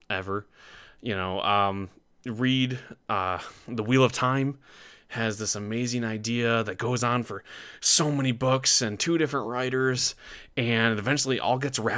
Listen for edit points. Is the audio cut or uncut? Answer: uncut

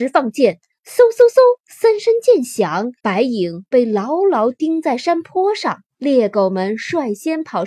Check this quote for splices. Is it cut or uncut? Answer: cut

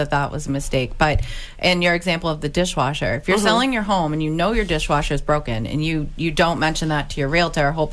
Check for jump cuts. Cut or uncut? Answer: uncut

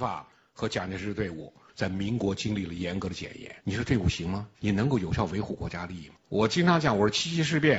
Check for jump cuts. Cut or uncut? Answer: cut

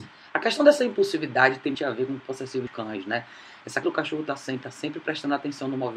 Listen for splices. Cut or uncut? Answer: cut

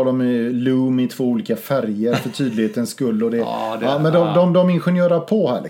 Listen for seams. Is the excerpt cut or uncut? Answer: uncut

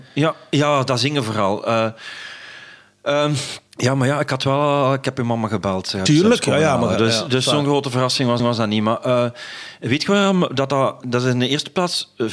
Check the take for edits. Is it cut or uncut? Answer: cut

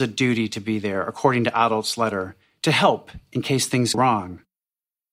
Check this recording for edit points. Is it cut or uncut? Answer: cut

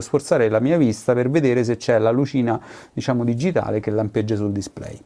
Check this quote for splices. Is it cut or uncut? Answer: uncut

